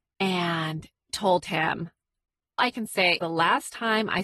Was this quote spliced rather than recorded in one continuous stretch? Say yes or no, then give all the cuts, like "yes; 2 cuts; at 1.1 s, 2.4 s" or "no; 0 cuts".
yes; 3 cuts; at 1.1 s, 2.6 s, 3.2 s